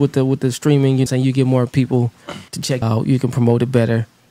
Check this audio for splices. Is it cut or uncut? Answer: cut